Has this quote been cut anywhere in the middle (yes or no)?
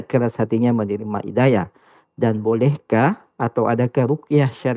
no